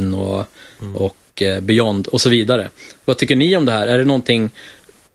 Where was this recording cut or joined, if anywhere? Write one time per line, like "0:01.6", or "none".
none